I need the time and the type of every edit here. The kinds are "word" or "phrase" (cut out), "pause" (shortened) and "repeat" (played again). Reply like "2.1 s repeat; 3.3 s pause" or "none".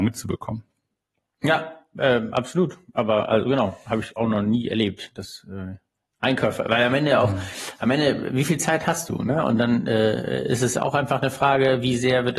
none